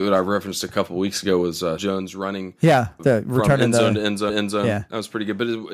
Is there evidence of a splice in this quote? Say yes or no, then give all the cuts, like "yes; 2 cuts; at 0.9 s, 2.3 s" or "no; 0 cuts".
yes; 3 cuts; at 1.8 s, 3.0 s, 4.3 s